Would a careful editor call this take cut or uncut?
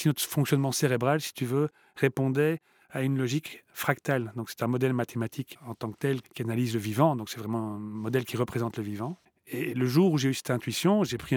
uncut